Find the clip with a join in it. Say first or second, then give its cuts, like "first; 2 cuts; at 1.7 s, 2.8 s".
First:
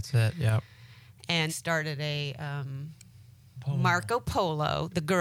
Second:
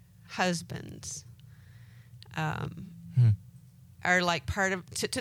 first; 2 cuts; at 1.5 s, 3.6 s